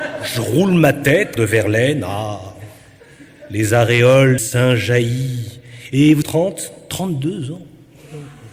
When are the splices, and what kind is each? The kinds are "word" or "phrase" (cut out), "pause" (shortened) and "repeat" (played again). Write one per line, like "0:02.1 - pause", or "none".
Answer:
0:01.4 - phrase
0:04.4 - word
0:06.2 - word